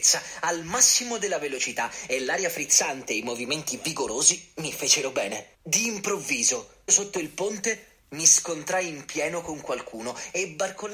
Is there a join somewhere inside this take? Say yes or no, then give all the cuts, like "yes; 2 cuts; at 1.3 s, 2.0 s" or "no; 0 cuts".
yes; 2 cuts; at 5.5 s, 6.9 s